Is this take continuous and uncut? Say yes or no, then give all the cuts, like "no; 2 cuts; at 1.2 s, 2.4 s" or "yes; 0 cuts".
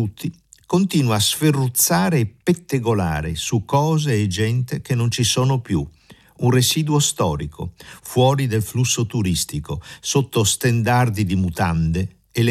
yes; 0 cuts